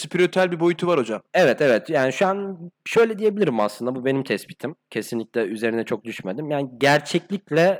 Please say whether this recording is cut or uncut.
cut